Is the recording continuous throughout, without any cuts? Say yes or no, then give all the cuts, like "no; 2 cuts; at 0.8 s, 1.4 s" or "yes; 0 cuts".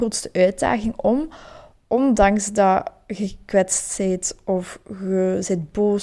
yes; 0 cuts